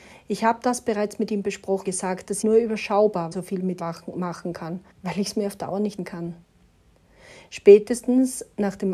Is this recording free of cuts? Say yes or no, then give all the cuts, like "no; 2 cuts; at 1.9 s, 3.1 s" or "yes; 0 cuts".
no; 6 cuts; at 1.9 s, 2.4 s, 3.3 s, 3.8 s, 4.9 s, 6.0 s